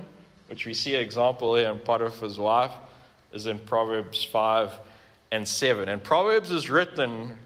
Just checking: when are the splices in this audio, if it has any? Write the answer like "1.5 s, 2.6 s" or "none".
none